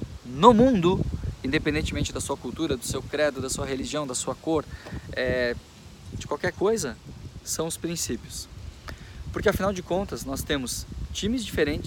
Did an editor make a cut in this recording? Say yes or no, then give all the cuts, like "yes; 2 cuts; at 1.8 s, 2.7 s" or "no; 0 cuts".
no; 0 cuts